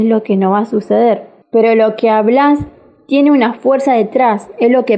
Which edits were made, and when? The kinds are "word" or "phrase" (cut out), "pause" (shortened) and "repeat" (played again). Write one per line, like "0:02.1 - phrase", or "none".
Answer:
0:01.4 - pause